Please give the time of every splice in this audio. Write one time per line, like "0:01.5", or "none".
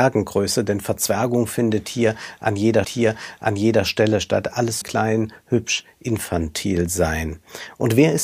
0:02.8
0:04.8